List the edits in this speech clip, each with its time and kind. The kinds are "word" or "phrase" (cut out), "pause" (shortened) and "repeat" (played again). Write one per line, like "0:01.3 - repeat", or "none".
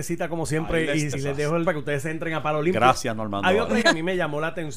0:01.1 - word
0:01.7 - word
0:03.8 - word